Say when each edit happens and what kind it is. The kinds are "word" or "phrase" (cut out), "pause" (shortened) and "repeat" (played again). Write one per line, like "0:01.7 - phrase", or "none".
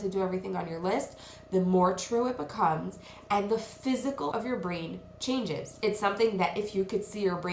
0:04.3 - word